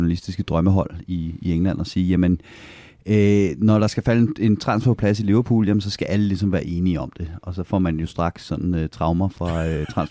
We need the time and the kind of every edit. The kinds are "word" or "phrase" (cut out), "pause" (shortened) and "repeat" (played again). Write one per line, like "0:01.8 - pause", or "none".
none